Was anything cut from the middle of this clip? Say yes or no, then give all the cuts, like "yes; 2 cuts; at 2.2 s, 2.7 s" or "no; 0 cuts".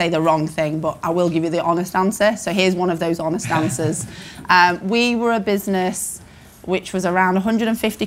no; 0 cuts